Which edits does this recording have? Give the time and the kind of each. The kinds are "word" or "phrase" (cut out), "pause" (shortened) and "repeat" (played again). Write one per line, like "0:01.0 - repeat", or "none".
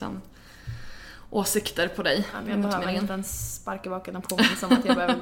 none